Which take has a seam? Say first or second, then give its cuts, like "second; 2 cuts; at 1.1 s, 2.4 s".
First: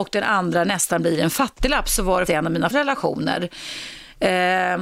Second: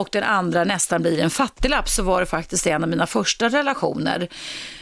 first; 2 cuts; at 2.3 s, 2.7 s